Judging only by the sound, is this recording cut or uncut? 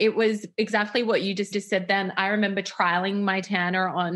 cut